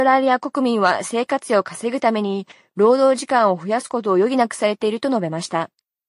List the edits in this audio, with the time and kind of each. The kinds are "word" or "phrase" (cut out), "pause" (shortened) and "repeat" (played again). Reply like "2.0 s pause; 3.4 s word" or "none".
none